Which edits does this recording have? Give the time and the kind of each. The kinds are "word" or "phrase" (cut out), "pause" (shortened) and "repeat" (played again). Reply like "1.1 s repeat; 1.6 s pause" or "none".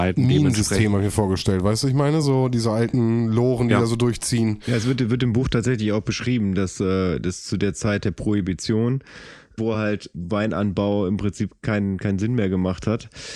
none

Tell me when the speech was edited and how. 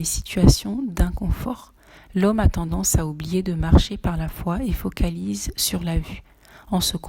none

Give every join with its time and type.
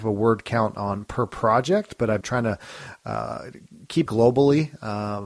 2.2 s word; 4.1 s word

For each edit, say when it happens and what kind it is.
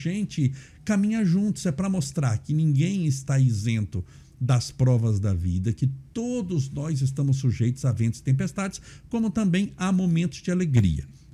none

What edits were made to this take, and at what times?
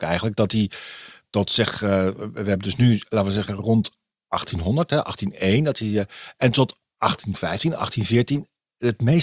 none

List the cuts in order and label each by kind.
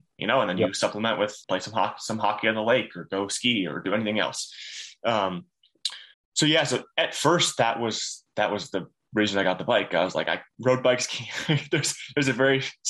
1.4 s pause; 6.1 s pause; 10.5 s pause

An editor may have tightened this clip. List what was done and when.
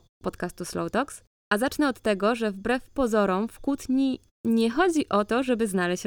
none

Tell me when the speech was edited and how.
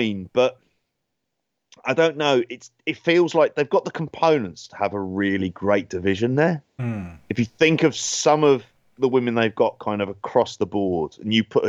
none

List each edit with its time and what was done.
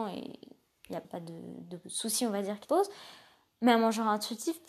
1.0 s word; 2.6 s word

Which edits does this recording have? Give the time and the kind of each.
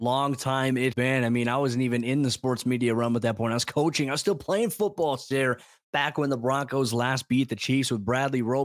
0.9 s word

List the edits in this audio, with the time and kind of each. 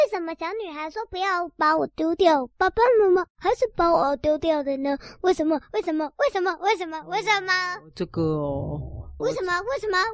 9.2 s phrase

